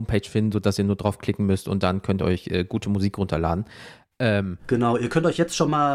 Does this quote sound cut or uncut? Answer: uncut